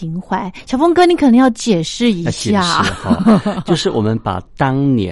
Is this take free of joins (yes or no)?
yes